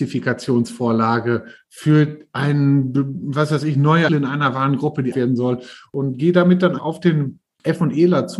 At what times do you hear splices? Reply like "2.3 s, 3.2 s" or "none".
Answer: 4.1 s, 5.1 s, 6.8 s